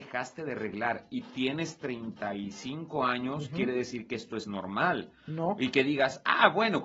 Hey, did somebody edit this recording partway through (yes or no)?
no